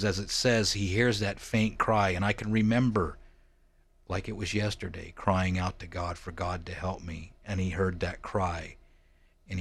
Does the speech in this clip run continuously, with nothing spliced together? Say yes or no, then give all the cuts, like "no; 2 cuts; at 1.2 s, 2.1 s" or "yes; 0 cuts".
yes; 0 cuts